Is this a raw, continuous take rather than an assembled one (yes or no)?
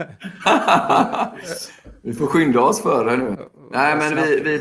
yes